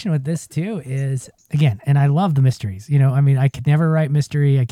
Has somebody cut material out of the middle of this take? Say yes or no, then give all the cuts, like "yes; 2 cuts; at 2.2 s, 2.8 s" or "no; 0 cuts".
no; 0 cuts